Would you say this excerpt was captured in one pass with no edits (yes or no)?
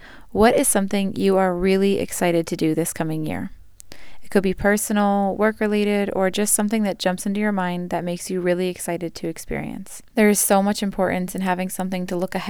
no